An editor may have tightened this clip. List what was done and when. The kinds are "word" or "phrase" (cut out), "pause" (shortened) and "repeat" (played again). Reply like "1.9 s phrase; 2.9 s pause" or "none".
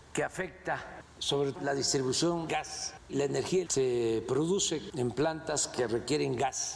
1.5 s word; 2.5 s word; 3.1 s word; 3.6 s word